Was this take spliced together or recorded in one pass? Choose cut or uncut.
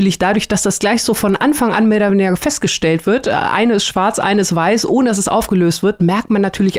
uncut